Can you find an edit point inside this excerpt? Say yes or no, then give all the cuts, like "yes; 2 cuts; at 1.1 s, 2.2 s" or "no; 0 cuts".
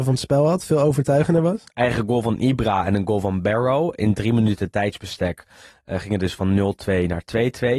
no; 0 cuts